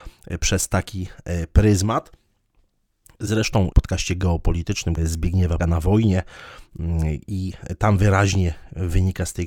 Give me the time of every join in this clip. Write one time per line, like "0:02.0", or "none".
0:03.7
0:05.0
0:05.6